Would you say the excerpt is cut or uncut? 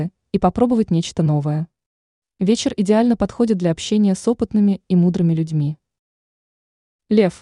uncut